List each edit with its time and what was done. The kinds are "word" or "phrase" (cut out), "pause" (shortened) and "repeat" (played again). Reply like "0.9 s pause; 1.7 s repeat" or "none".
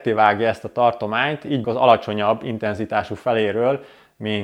1.6 s word